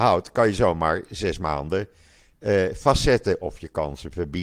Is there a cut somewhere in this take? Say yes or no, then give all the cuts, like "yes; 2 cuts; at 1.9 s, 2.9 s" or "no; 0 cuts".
no; 0 cuts